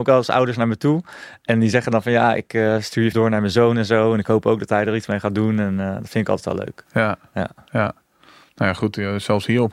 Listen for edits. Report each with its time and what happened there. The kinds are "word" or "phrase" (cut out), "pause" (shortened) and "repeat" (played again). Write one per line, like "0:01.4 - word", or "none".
0:03.1 - word